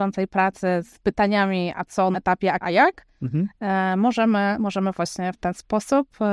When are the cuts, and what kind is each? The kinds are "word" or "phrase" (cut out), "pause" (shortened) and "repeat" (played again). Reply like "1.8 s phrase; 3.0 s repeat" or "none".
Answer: 2.1 s word; 2.6 s word